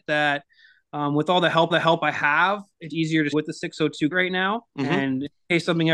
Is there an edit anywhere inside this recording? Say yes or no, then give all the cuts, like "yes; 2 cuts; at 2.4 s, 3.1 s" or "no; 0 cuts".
yes; 5 cuts; at 1.7 s, 2.9 s, 3.3 s, 4.1 s, 4.7 s